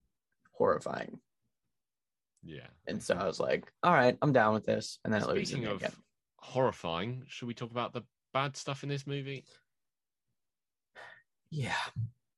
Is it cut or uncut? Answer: uncut